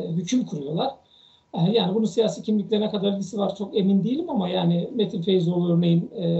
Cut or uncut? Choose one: uncut